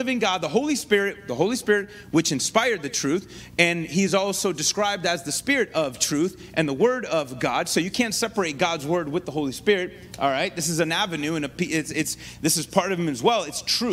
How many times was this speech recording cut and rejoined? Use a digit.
0